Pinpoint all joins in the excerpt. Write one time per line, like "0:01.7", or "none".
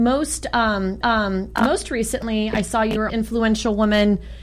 0:01.0
0:03.1